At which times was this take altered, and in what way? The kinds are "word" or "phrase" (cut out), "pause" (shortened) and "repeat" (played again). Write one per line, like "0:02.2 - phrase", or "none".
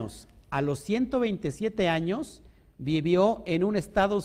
none